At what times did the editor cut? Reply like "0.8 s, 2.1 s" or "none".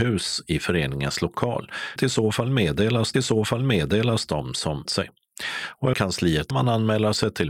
2.0 s, 3.1 s, 4.9 s, 5.9 s, 6.5 s